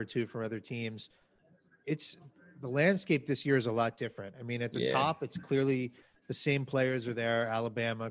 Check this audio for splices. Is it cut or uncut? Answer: uncut